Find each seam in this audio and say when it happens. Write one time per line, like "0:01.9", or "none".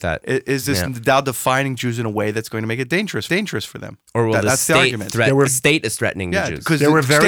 0:03.3
0:04.1
0:05.5